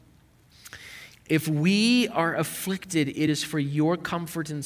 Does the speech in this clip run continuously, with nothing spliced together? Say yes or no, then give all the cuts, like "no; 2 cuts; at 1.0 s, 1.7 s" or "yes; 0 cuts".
yes; 0 cuts